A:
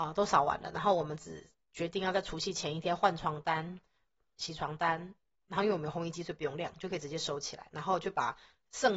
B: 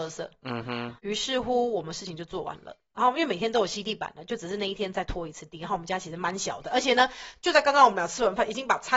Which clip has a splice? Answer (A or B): B